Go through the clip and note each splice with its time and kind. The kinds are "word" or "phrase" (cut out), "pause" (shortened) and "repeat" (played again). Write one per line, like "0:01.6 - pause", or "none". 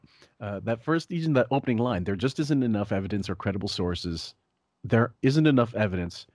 none